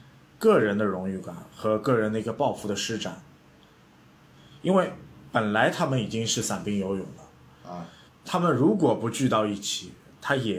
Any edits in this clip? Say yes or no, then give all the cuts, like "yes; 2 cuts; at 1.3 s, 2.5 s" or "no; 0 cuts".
yes; 1 cut; at 8.1 s